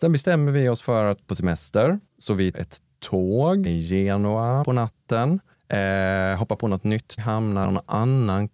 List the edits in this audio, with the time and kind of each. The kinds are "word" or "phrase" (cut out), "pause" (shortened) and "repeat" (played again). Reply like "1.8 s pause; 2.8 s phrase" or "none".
1.3 s phrase; 2.1 s pause; 2.5 s word; 3.7 s word; 4.6 s word; 5.5 s pause; 7.2 s word; 7.6 s word